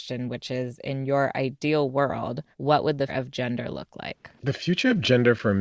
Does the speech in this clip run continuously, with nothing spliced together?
no; 3 cuts; at 2.5 s, 3.1 s, 4.4 s

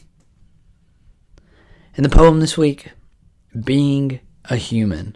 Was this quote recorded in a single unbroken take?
yes; 0 cuts

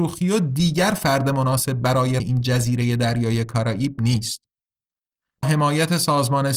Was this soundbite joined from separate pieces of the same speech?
yes; 2 cuts; at 2.2 s, 5.4 s

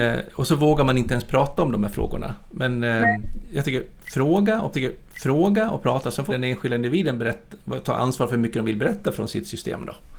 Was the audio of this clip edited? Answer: yes; 2 cuts; at 4.7 s, 6.3 s

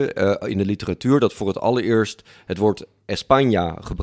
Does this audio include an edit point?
no; 0 cuts

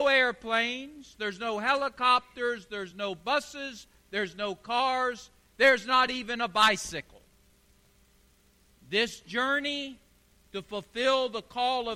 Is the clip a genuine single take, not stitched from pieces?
yes; 0 cuts

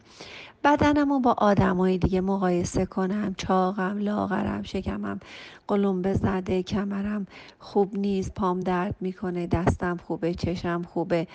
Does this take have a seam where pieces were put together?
no; 0 cuts

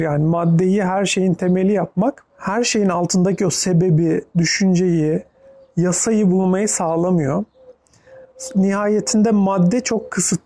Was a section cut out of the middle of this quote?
no; 0 cuts

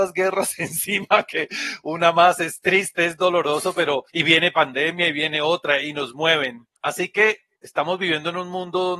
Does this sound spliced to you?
yes; 2 cuts; at 4.1 s, 6.8 s

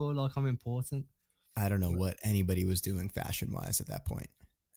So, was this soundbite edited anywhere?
no; 0 cuts

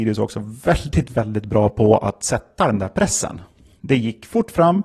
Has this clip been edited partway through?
no; 0 cuts

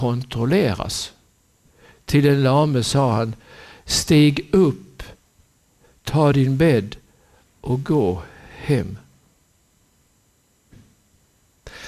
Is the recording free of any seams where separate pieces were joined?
yes; 0 cuts

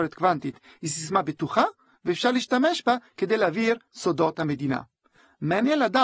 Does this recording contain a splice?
no; 0 cuts

